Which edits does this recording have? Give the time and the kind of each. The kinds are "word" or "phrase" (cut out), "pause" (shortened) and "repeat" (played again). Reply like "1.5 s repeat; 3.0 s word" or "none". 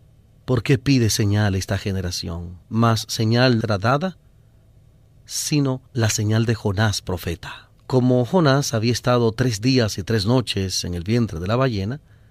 2.6 s pause; 3.6 s word; 5.9 s pause; 7.8 s pause